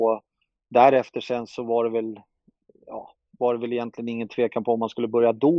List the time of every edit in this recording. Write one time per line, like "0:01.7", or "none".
none